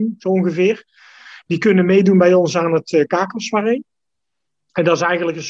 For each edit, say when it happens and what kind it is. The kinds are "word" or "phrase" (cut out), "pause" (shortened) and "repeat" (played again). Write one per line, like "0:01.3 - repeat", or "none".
none

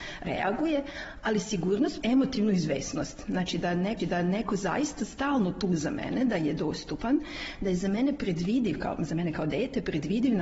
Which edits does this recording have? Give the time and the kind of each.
0:02.0 - word
0:04.0 - repeat

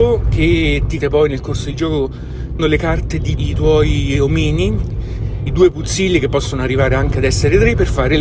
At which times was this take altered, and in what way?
0:01.0 - word
0:02.6 - word
0:03.4 - word
0:05.5 - word

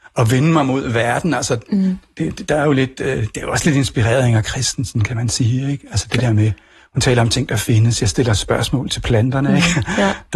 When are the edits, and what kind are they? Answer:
none

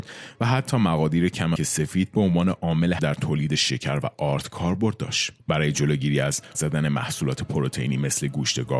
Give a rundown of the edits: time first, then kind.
0:01.6 - word
0:03.0 - phrase
0:06.5 - word

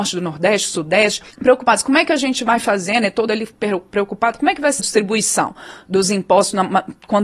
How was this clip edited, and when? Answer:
0:01.3 - pause
0:03.3 - word
0:04.8 - word

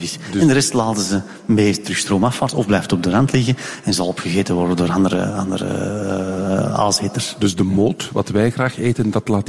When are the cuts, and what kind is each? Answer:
none

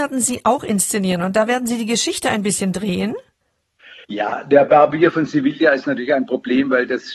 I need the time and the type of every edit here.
0:04.0 - pause

